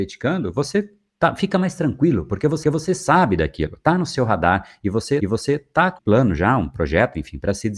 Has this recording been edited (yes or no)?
yes